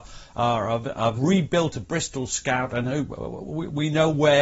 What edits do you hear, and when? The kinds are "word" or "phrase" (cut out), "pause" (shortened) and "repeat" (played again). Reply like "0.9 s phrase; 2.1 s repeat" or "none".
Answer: 1.2 s word